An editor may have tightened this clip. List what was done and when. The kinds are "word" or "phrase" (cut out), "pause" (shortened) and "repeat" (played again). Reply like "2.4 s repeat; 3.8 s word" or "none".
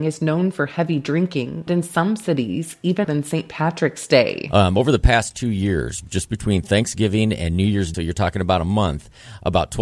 1.7 s word; 3.0 s word; 7.9 s phrase